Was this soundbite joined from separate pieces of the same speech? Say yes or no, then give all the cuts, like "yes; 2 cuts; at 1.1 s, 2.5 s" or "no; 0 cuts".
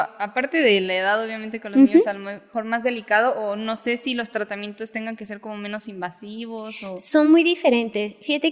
no; 0 cuts